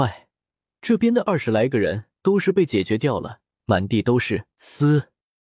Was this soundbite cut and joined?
yes; 2 cuts; at 2.2 s, 4.5 s

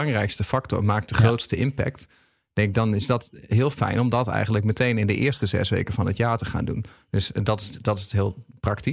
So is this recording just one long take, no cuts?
yes; 0 cuts

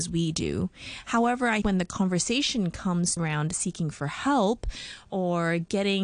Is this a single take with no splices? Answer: no; 2 cuts; at 1.6 s, 3.2 s

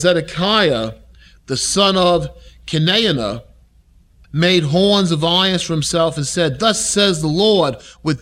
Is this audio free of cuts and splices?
yes; 0 cuts

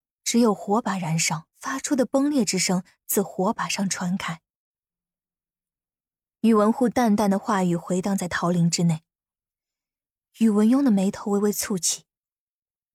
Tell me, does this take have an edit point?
yes; 1 cut; at 1.5 s

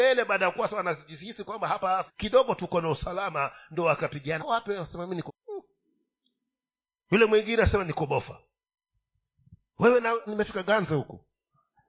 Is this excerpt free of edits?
no; 4 cuts; at 2.1 s, 4.4 s, 5.3 s, 10.3 s

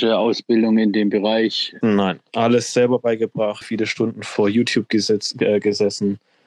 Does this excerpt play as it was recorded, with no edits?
no; 1 cut; at 3.6 s

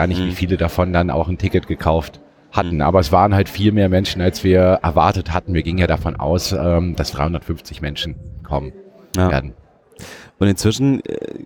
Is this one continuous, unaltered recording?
no; 1 cut; at 7.1 s

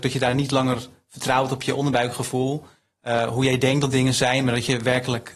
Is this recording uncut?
yes; 0 cuts

